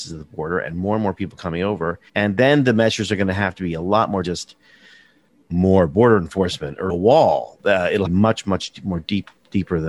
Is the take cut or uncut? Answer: cut